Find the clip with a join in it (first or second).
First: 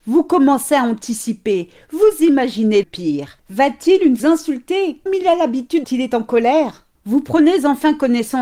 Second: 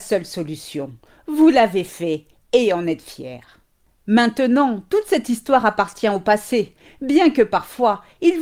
first